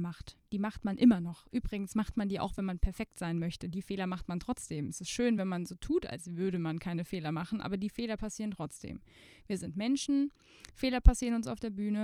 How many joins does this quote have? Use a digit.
0